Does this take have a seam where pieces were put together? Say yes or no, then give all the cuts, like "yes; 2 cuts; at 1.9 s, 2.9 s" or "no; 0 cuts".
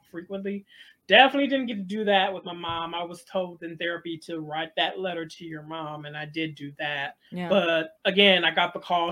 yes; 2 cuts; at 7.3 s, 8.0 s